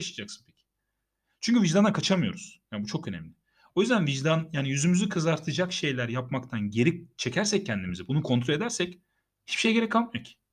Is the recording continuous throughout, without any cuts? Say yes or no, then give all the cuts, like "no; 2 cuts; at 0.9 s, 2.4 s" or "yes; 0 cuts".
yes; 0 cuts